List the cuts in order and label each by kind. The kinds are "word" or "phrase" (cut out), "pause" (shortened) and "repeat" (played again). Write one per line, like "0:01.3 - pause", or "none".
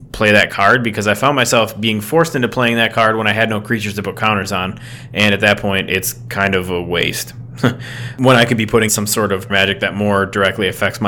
0:08.9 - word
0:09.5 - word